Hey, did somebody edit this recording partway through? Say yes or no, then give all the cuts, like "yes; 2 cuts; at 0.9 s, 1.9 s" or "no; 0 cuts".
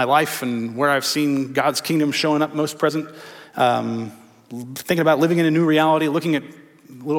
no; 0 cuts